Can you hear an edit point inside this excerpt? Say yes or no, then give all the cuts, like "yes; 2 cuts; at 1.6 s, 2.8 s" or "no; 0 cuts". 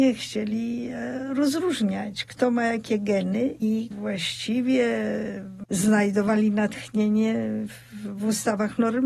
yes; 1 cut; at 3.9 s